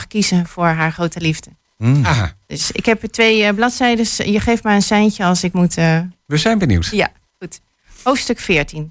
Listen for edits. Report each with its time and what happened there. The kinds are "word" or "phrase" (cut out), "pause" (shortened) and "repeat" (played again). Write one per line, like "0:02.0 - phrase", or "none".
none